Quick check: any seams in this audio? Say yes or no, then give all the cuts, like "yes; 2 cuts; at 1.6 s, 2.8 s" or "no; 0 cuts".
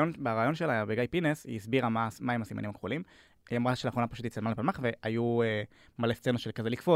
no; 0 cuts